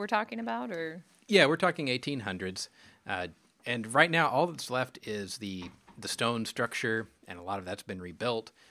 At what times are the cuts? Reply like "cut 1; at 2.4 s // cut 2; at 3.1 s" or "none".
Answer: none